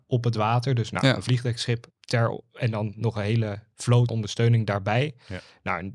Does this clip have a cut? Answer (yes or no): yes